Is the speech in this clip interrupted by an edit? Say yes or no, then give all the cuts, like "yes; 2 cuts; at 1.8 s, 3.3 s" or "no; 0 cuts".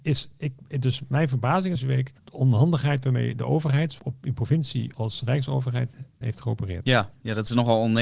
yes; 5 cuts; at 1.8 s, 2.2 s, 4.0 s, 4.9 s, 6.2 s